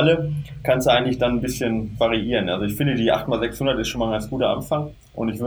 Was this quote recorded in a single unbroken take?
yes; 0 cuts

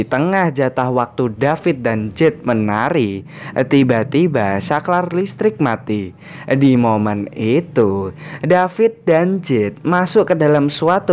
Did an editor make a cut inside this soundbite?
no; 0 cuts

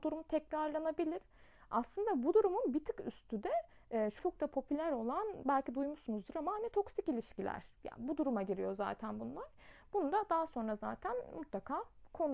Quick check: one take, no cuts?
no; 1 cut; at 4.2 s

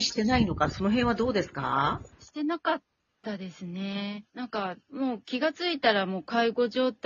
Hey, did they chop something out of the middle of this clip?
yes; 3 cuts; at 2.1 s, 4.3 s, 4.8 s

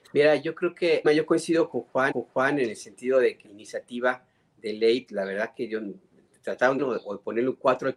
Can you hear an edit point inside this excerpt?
yes; 5 cuts; at 1.0 s, 2.1 s, 3.4 s, 5.1 s, 6.8 s

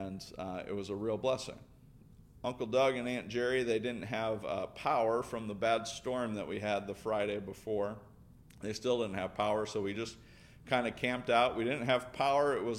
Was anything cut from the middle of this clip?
no; 0 cuts

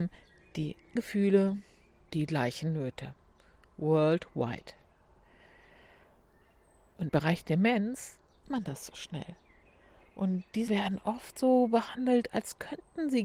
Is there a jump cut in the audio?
yes; 5 cuts; at 1.0 s, 2.1 s, 7.1 s, 8.4 s, 10.7 s

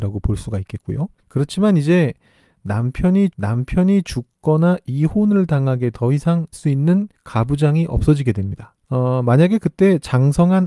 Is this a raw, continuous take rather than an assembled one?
no; 6 cuts; at 1.2 s, 3.3 s, 5.9 s, 6.5 s, 7.1 s, 8.8 s

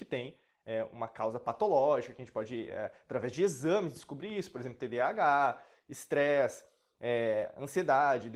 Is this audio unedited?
yes; 0 cuts

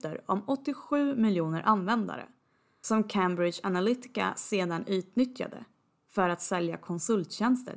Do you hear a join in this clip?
no; 0 cuts

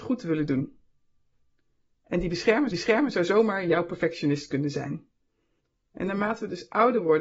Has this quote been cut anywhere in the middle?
yes; 1 cut; at 2.7 s

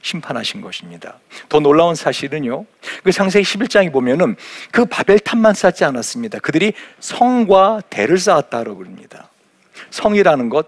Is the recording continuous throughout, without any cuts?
yes; 0 cuts

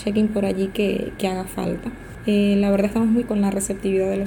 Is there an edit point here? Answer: yes; 1 cut; at 3.2 s

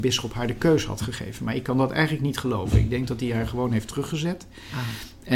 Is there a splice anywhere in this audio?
no; 0 cuts

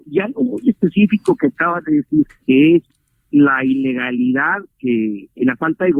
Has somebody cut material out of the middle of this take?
yes; 1 cut; at 2.4 s

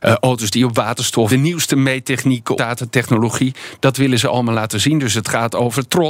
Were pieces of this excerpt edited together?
yes; 2 cuts; at 1.3 s, 2.6 s

